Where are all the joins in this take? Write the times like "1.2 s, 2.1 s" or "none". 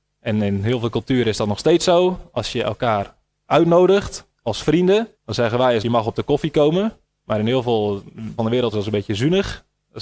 4.3 s, 5.2 s, 5.8 s, 7.0 s, 8.4 s, 8.7 s